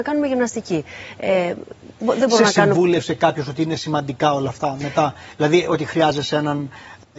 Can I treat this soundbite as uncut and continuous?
yes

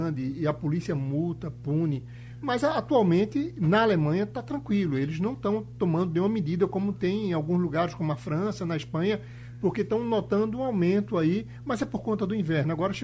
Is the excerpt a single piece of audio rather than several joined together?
yes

